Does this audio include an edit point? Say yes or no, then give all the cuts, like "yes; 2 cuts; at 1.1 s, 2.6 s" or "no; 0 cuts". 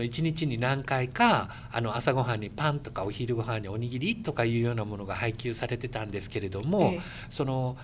no; 0 cuts